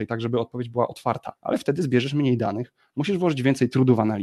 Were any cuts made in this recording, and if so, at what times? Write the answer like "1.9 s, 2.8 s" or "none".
1.4 s